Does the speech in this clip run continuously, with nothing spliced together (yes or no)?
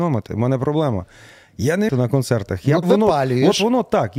no